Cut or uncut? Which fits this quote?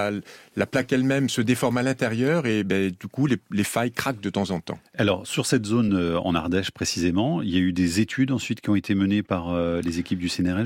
uncut